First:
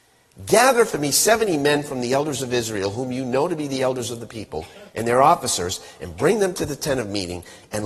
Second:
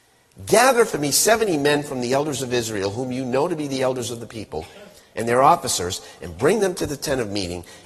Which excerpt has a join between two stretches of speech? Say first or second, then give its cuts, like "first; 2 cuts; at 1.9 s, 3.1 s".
first; 1 cut; at 4.9 s